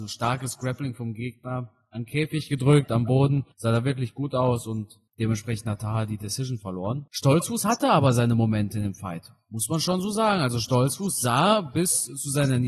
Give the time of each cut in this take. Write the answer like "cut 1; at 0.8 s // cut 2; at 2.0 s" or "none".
cut 1; at 3.5 s // cut 2; at 5.1 s // cut 3; at 7.1 s